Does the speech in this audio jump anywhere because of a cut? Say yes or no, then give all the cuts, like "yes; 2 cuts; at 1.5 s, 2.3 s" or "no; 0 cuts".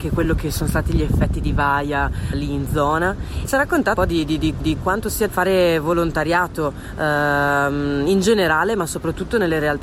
yes; 5 cuts; at 2.3 s, 3.4 s, 4.0 s, 4.6 s, 5.3 s